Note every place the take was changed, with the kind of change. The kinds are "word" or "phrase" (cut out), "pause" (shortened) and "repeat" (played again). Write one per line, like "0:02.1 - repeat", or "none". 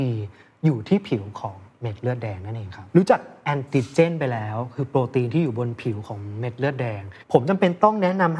0:07.2 - pause